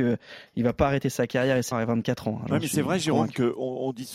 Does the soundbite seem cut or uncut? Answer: cut